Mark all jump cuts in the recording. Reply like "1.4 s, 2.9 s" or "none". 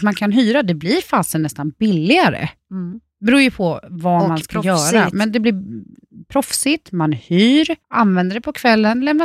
7.8 s